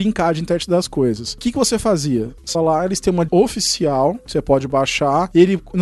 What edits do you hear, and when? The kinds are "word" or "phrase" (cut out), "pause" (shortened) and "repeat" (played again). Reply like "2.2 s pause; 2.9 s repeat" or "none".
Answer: 2.5 s word; 3.3 s phrase